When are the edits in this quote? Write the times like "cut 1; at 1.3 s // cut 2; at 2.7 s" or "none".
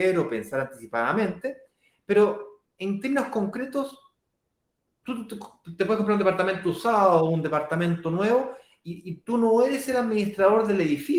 cut 1; at 2.7 s

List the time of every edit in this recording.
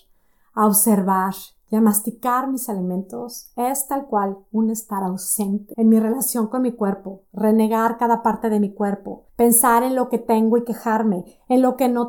cut 1; at 9.3 s

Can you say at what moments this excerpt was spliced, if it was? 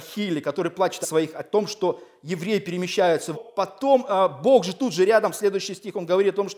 cut 1; at 1.0 s // cut 2; at 3.3 s

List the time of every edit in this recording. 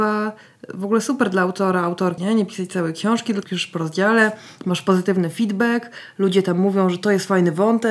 cut 1; at 2.2 s // cut 2; at 3.4 s

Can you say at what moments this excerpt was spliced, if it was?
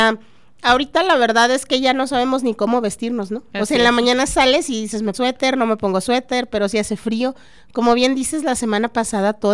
cut 1; at 5.1 s

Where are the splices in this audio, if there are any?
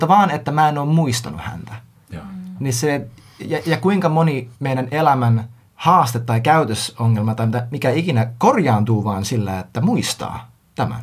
cut 1; at 4.5 s // cut 2; at 5.6 s

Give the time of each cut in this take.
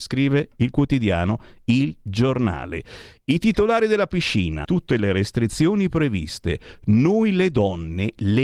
cut 1; at 4.6 s

